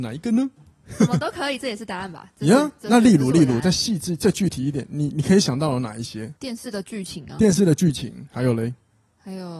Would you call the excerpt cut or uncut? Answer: cut